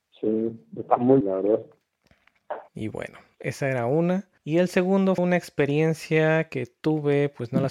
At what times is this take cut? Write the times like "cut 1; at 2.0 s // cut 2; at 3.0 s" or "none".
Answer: cut 1; at 1.2 s // cut 2; at 2.7 s // cut 3; at 4.4 s // cut 4; at 5.2 s